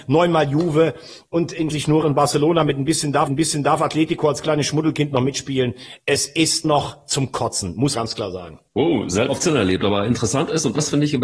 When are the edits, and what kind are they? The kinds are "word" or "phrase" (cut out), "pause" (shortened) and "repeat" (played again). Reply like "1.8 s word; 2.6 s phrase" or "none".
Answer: 1.7 s phrase; 2.0 s word; 3.3 s repeat; 6.6 s word; 7.9 s phrase; 8.7 s pause; 9.3 s word

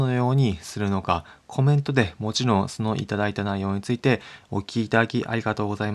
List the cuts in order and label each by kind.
none

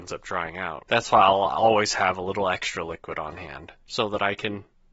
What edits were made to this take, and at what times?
none

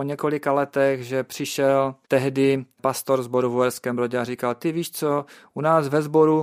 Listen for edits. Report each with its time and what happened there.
2.0 s pause

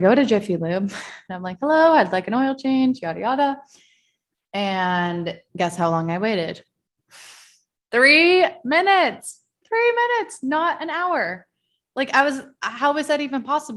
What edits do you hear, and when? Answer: 5.5 s pause

